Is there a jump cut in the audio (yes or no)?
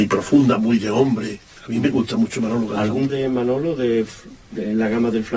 yes